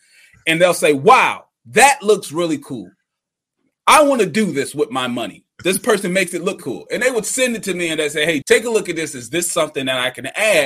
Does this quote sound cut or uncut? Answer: cut